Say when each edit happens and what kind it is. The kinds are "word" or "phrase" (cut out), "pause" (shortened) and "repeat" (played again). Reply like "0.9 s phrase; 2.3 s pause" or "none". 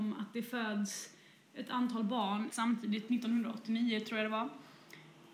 2.5 s word